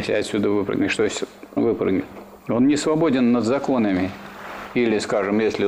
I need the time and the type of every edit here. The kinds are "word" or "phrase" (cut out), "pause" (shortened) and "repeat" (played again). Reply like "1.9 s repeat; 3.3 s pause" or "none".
1.6 s phrase; 2.4 s pause